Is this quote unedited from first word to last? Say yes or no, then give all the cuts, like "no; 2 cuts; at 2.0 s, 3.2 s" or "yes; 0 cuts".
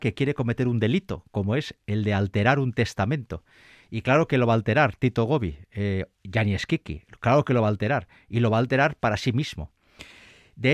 yes; 0 cuts